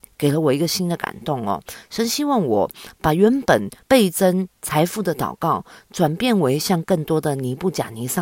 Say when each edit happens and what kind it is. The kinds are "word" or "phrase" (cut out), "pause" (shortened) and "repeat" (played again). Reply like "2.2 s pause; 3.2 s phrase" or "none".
3.8 s pause

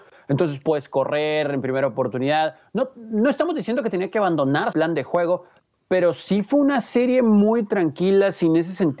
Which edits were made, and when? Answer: 4.7 s word

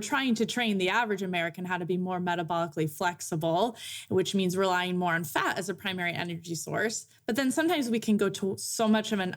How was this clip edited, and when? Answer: none

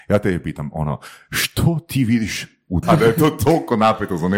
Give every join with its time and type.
2.8 s word

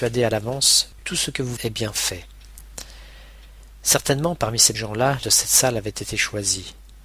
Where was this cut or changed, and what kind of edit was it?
1.0 s word; 1.6 s word; 4.7 s word; 5.2 s phrase

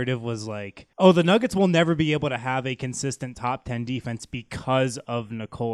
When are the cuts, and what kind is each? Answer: 0.9 s pause

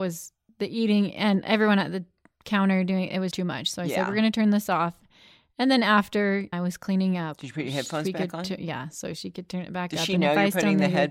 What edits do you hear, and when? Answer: 3.3 s word; 6.5 s phrase

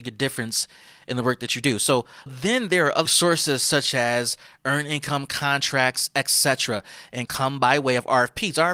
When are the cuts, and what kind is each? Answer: 2.3 s word; 3.0 s word; 7.3 s word

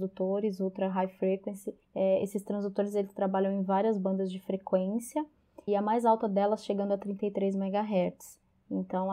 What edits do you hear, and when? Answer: 1.8 s pause; 5.7 s word

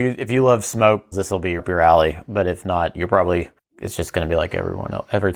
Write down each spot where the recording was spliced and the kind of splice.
1.1 s word; 1.6 s word; 3.6 s pause

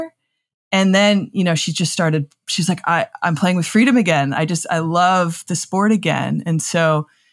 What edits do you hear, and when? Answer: none

